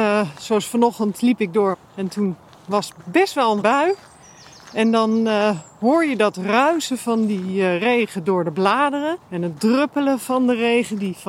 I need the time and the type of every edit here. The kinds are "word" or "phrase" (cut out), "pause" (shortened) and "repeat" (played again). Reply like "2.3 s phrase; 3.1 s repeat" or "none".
1.7 s phrase; 3.6 s word; 9.2 s pause